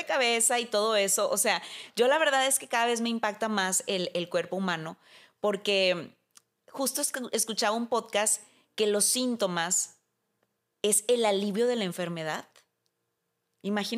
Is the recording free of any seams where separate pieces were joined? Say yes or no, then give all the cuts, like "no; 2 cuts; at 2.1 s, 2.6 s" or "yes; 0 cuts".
yes; 0 cuts